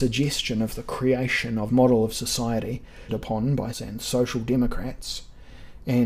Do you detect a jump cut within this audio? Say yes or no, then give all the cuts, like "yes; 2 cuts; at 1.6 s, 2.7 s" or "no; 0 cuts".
yes; 3 cuts; at 1.7 s, 3.1 s, 3.7 s